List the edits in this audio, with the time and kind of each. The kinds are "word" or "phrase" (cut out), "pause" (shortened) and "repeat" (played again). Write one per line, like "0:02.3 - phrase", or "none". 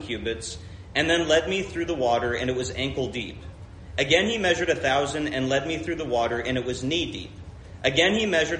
none